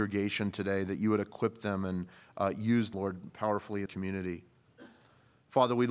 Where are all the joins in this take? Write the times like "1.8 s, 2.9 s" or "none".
2.9 s, 3.9 s